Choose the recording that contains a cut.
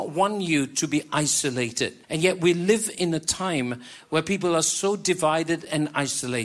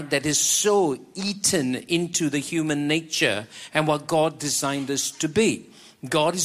first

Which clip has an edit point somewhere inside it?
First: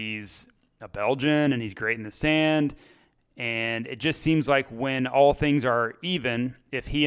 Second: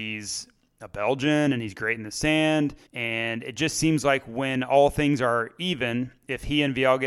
second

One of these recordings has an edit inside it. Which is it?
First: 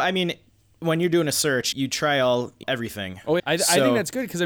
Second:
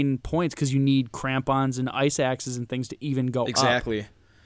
first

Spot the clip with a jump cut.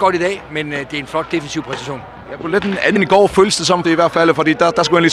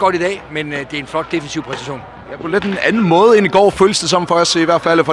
first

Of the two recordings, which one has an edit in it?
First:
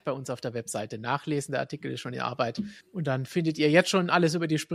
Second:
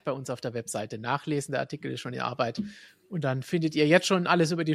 first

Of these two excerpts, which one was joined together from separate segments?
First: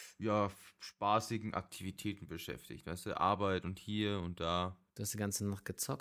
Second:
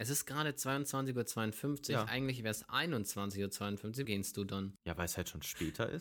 second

